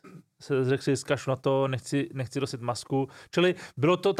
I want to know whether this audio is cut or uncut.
uncut